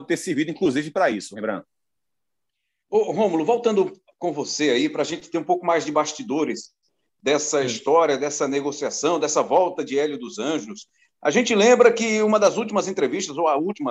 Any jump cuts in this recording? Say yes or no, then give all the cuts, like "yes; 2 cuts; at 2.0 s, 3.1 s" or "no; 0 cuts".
no; 0 cuts